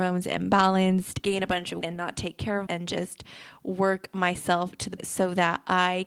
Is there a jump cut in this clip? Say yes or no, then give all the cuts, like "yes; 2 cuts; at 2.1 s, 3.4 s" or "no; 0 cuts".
yes; 4 cuts; at 1.2 s, 1.8 s, 2.7 s, 5.0 s